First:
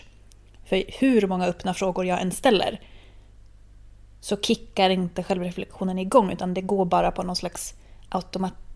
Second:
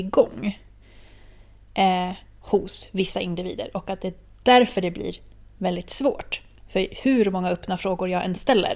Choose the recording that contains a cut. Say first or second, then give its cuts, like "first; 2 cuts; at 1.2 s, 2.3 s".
second; 1 cut; at 6.6 s